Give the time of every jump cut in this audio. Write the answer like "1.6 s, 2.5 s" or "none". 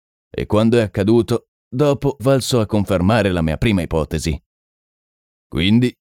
2.2 s